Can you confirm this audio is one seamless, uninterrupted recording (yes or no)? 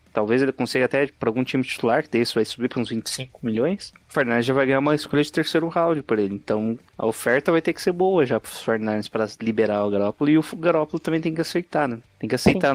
no